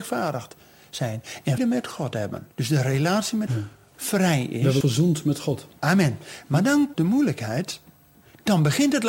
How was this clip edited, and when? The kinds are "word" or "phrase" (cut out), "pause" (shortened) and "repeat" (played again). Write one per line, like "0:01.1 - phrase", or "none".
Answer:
0:01.6 - word
0:02.5 - pause
0:03.5 - phrase
0:04.8 - word
0:06.9 - word